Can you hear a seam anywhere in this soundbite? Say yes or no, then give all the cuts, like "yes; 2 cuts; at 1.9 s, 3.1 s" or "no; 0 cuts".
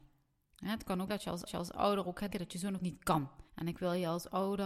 yes; 5 cuts; at 1.1 s, 1.5 s, 2.3 s, 2.8 s, 3.5 s